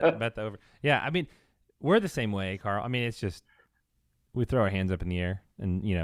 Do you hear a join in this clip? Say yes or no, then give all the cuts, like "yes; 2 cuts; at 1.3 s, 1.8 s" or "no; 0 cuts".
no; 0 cuts